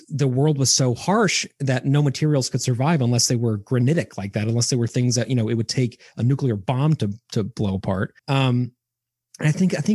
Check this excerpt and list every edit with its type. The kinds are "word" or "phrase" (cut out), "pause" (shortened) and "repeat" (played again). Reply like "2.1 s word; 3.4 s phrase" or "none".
8.2 s pause

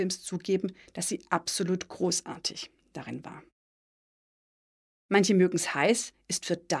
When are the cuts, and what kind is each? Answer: none

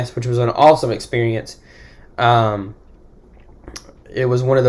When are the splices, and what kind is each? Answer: none

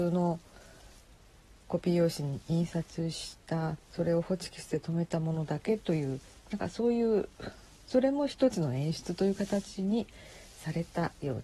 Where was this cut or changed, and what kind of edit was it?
3.8 s pause

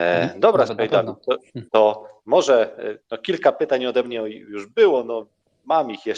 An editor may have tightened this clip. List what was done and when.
1.7 s pause

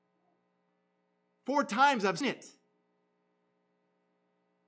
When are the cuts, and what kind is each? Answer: 2.2 s word

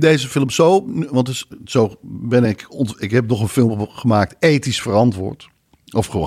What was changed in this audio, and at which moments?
none

